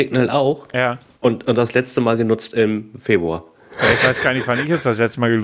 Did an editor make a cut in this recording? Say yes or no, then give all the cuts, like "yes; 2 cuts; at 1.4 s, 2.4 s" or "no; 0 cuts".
no; 0 cuts